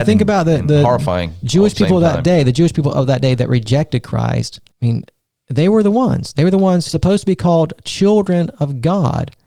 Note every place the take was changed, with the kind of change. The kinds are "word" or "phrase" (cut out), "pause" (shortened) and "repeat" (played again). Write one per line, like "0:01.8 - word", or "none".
0:04.7 - pause
0:06.9 - phrase